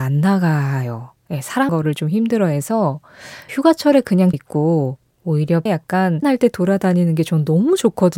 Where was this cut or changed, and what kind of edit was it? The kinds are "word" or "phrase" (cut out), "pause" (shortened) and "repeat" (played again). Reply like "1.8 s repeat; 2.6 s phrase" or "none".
1.7 s word; 3.5 s word; 4.3 s word; 5.7 s word; 6.2 s word